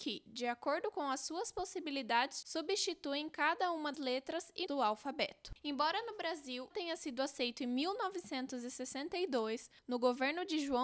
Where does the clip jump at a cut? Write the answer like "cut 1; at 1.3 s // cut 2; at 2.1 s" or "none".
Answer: cut 1; at 2.4 s // cut 2; at 3.9 s // cut 3; at 4.7 s // cut 4; at 6.7 s